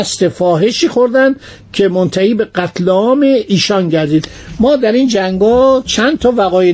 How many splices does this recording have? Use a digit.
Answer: 0